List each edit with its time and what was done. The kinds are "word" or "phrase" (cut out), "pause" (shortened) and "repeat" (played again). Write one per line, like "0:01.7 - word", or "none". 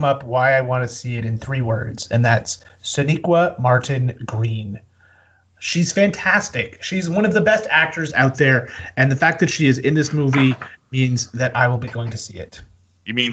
none